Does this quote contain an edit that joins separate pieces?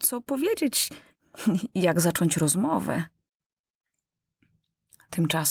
no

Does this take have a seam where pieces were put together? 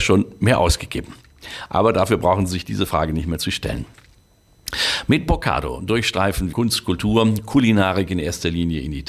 yes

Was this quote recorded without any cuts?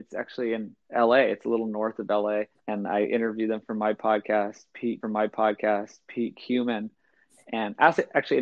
no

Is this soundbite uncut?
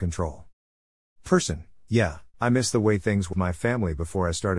no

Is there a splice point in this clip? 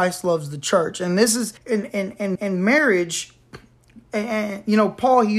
yes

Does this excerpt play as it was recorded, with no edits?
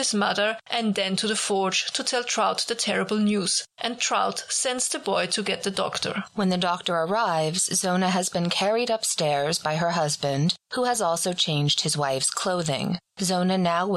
yes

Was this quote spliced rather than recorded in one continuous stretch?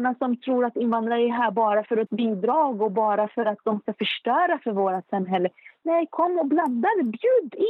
yes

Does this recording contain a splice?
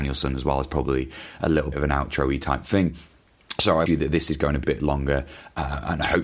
yes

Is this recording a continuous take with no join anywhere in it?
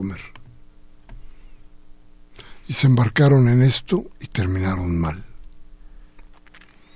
yes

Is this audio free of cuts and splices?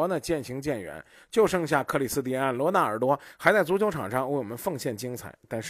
yes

